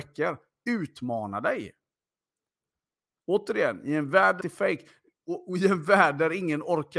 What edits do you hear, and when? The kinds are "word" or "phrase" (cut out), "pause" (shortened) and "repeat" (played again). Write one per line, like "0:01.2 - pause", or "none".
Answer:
0:04.4 - word